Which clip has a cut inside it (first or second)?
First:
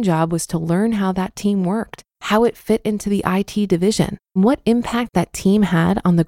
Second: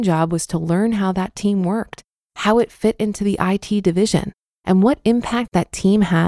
first